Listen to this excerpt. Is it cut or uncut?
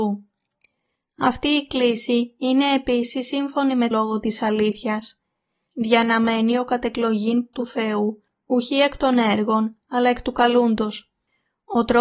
cut